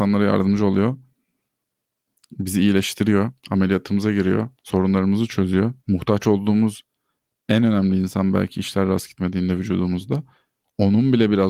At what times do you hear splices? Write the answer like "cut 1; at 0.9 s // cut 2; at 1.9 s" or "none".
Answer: cut 1; at 3.4 s // cut 2; at 4.5 s // cut 3; at 5.8 s